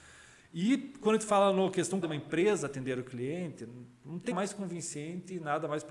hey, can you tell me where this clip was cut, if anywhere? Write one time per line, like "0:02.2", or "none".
0:02.0
0:04.3